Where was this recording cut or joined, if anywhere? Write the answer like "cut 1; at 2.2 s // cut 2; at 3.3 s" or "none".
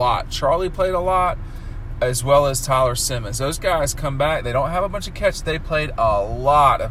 none